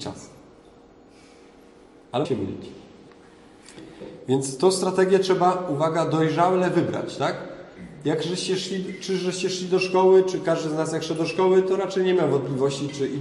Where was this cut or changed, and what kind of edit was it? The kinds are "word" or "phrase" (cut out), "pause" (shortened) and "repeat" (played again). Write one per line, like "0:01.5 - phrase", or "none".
0:02.2 - word